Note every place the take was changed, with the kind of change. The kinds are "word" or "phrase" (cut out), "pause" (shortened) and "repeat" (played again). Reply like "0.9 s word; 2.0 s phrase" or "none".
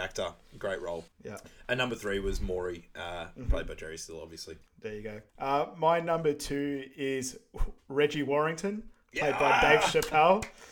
1.1 s pause; 4.6 s pause; 5.3 s pause